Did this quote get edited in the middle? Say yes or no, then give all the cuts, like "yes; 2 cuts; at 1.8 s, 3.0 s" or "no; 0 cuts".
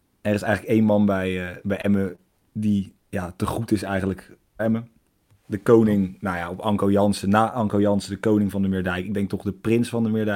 yes; 2 cuts; at 3.0 s, 4.6 s